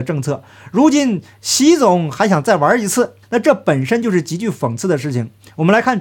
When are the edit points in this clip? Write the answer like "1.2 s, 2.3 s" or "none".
3.2 s